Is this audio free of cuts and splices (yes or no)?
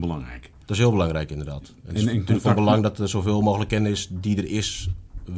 yes